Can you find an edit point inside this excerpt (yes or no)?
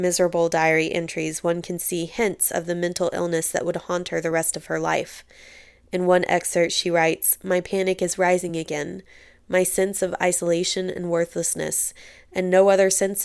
no